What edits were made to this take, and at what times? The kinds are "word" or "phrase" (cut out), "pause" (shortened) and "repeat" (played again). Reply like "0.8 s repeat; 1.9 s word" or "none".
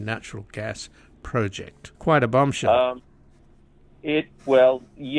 1.9 s pause